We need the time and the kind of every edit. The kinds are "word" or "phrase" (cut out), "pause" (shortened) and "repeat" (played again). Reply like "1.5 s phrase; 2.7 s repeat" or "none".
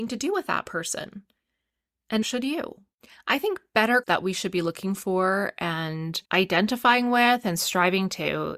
2.2 s word; 4.0 s word; 6.2 s pause